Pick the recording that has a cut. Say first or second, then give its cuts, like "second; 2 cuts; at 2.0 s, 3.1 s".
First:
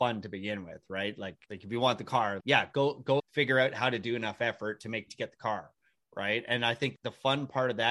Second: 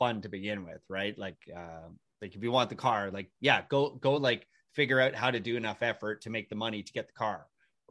first; 5 cuts; at 1.4 s, 2.4 s, 3.2 s, 5.1 s, 7.0 s